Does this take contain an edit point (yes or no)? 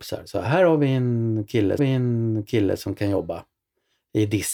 yes